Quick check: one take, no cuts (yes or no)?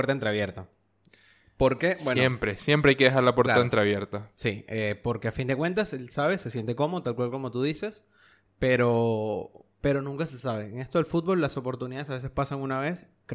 yes